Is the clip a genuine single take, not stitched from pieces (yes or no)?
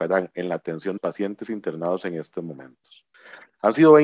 no